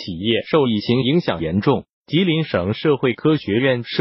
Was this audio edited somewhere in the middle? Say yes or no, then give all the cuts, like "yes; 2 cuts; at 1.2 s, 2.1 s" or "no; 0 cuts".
yes; 1 cut; at 1.9 s